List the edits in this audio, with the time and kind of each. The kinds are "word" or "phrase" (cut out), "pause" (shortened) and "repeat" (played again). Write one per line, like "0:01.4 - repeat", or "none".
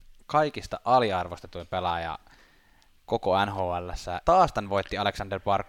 0:04.2 - word